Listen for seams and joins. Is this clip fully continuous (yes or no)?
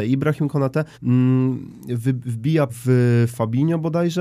no